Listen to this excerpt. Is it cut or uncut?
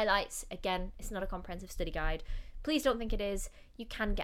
uncut